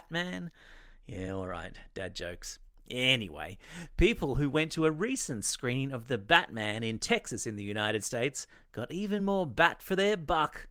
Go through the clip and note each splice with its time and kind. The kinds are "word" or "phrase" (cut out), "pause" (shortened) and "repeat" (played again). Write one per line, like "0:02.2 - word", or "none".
none